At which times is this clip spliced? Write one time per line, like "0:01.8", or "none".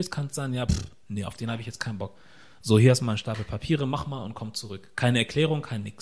none